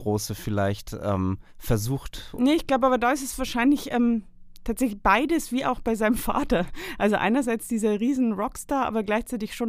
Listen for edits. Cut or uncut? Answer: cut